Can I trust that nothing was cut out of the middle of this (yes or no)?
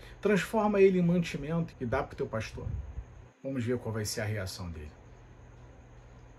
no